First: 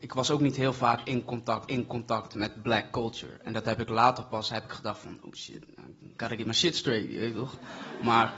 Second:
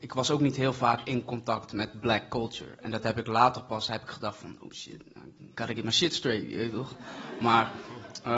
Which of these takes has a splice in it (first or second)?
first